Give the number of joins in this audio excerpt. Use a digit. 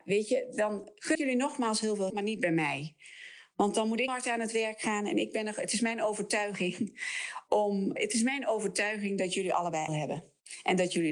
5